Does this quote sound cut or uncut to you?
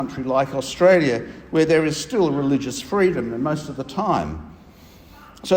uncut